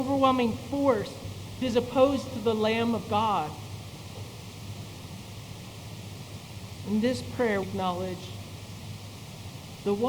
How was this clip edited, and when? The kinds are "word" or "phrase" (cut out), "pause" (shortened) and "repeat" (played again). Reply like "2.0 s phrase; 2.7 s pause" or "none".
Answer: 1.6 s word; 7.6 s word